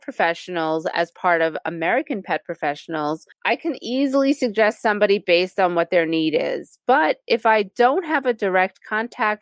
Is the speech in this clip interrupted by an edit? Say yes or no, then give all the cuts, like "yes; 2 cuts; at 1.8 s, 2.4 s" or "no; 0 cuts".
yes; 1 cut; at 3.3 s